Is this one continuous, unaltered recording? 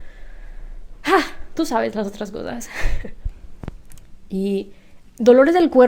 yes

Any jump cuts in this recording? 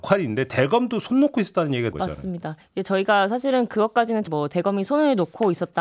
yes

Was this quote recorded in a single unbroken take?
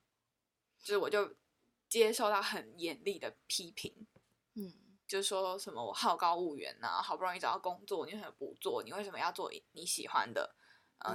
yes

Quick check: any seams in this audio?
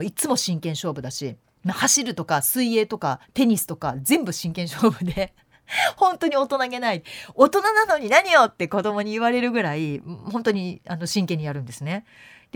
yes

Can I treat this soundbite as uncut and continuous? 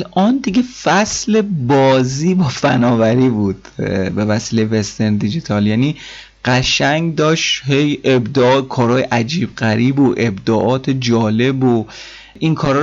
yes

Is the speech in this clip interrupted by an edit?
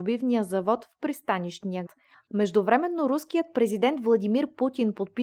yes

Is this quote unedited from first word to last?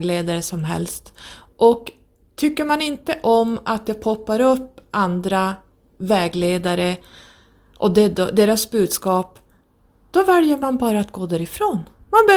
yes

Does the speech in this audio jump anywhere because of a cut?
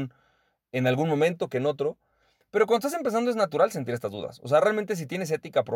no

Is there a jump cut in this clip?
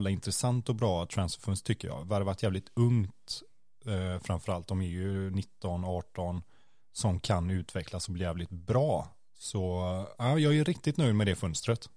no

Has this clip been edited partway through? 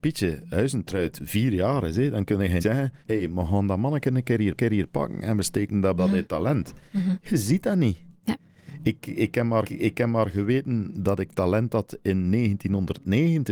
yes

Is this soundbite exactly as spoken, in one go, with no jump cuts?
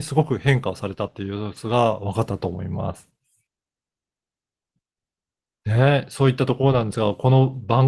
yes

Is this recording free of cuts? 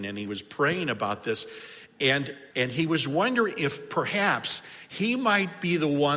no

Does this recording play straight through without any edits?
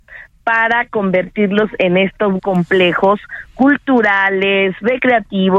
no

